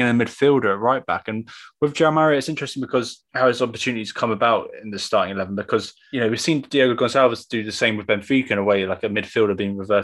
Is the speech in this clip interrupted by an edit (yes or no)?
yes